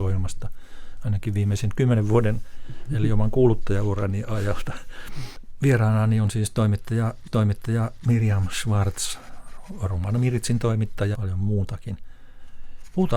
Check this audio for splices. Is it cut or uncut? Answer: cut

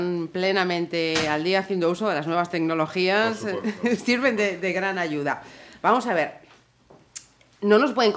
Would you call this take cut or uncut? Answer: uncut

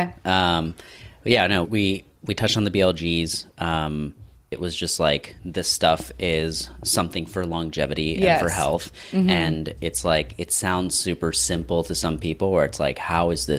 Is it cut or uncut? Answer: cut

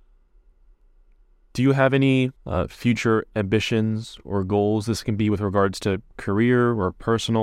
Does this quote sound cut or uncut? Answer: uncut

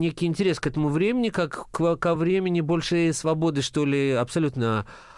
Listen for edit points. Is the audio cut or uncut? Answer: uncut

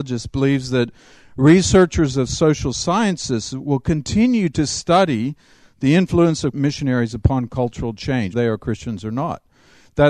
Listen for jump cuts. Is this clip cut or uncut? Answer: cut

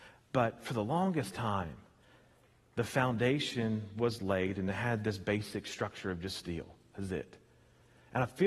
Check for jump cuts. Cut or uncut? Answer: uncut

